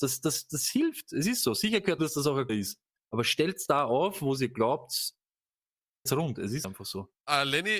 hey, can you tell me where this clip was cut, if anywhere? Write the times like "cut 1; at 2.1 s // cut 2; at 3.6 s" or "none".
cut 1; at 2.0 s // cut 2; at 2.5 s // cut 3; at 6.1 s // cut 4; at 6.6 s